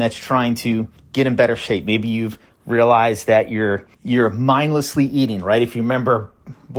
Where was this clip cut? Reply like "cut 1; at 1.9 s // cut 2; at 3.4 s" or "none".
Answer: cut 1; at 1.0 s // cut 2; at 3.9 s